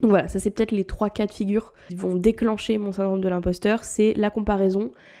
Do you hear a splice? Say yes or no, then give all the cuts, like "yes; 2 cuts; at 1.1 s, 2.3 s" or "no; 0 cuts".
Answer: yes; 1 cut; at 1.9 s